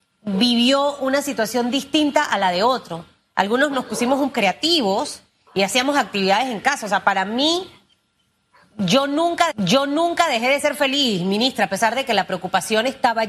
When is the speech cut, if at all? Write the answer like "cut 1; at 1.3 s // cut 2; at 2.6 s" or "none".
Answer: cut 1; at 4.3 s // cut 2; at 9.5 s